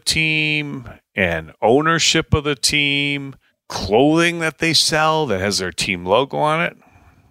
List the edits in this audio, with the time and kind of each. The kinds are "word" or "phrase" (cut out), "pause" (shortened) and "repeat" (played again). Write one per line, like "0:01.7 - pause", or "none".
none